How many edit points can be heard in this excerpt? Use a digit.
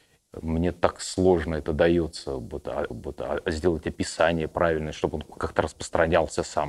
1